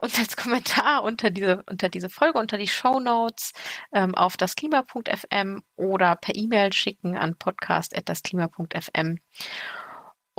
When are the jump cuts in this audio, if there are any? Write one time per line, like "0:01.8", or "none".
none